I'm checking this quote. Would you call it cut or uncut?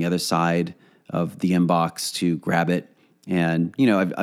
uncut